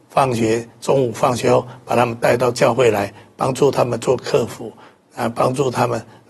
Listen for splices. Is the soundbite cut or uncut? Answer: uncut